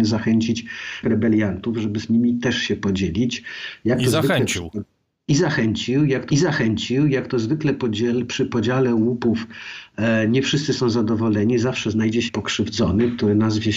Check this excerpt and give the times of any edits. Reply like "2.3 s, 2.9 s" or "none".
1.0 s, 6.3 s, 12.3 s